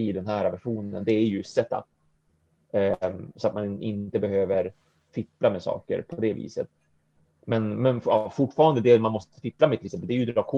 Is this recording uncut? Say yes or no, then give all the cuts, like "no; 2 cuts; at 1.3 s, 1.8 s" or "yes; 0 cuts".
yes; 0 cuts